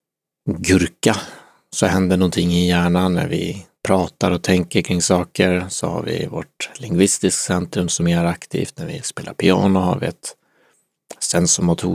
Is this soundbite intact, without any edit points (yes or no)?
no